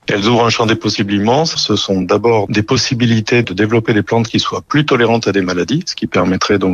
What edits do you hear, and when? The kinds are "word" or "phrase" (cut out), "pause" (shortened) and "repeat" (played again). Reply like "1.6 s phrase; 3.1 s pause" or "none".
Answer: none